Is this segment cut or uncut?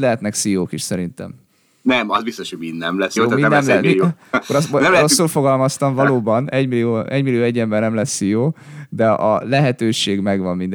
cut